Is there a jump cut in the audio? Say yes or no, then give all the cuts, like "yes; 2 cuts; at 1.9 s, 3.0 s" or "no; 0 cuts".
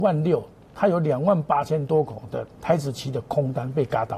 yes; 1 cut; at 2.5 s